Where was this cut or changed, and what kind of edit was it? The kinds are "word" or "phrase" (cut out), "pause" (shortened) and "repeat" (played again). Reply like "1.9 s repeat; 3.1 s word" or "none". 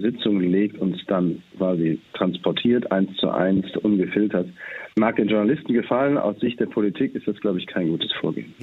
2.1 s pause; 4.9 s pause